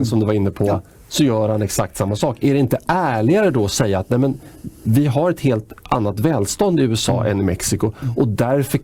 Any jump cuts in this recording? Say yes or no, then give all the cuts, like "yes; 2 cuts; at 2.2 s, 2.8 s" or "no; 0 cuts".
no; 0 cuts